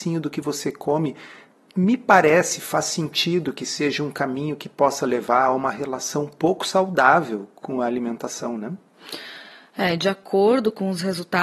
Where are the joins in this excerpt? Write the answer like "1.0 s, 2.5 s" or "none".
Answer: none